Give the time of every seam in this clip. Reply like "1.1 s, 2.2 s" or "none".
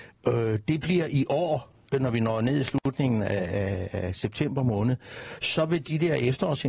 none